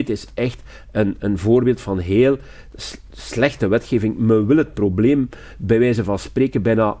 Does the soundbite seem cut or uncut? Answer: uncut